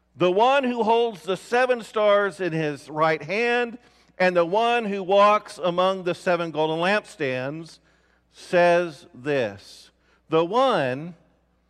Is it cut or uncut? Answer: uncut